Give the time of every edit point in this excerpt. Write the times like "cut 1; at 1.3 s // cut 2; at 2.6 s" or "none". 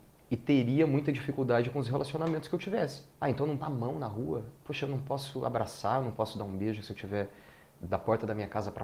cut 1; at 3.1 s // cut 2; at 3.6 s // cut 3; at 4.6 s